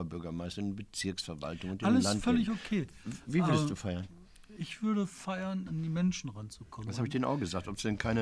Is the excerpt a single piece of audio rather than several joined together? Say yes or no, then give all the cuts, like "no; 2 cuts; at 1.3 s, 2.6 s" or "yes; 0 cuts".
no; 1 cut; at 5.7 s